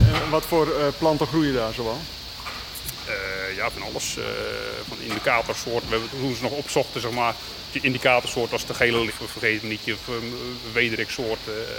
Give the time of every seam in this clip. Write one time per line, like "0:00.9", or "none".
0:06.1
0:09.1